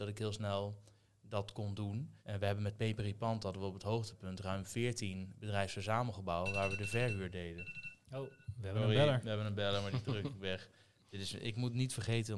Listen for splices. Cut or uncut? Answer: cut